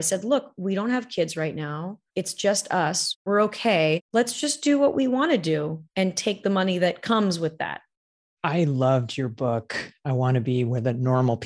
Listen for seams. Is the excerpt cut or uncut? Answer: uncut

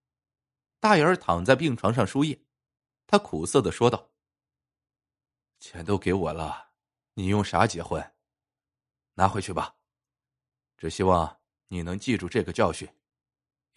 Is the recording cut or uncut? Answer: uncut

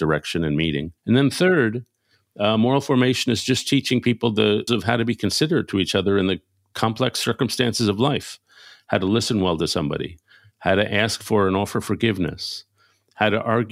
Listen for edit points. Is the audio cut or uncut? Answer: cut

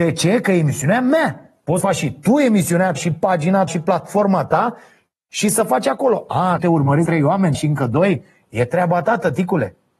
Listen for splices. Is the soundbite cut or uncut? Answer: cut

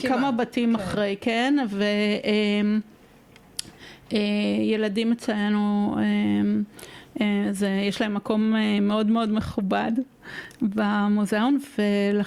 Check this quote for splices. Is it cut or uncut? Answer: uncut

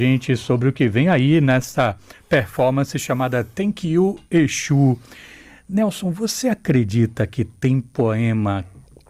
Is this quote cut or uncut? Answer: uncut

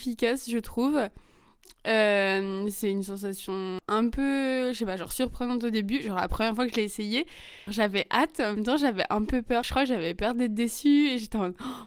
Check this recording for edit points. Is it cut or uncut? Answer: cut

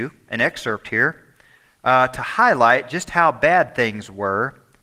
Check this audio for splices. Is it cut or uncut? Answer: uncut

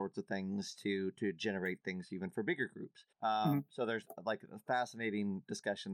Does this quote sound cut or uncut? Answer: cut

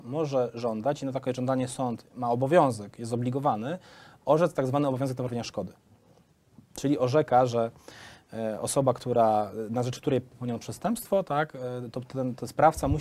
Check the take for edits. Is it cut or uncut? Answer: uncut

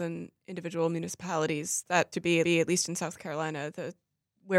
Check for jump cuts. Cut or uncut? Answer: cut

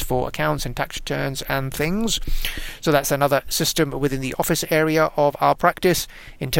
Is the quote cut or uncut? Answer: uncut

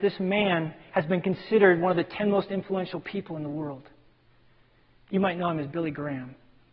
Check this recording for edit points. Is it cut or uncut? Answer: uncut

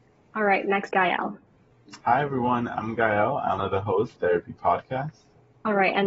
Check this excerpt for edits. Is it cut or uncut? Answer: cut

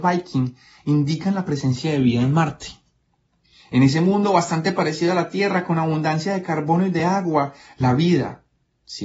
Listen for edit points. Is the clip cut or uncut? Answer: uncut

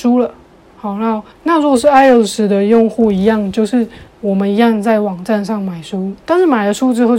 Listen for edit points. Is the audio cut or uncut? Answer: cut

